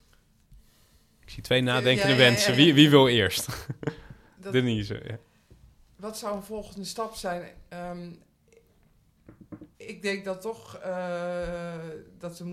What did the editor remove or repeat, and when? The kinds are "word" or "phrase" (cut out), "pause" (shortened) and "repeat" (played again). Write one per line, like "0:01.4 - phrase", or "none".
0:05.9 - pause
0:09.7 - pause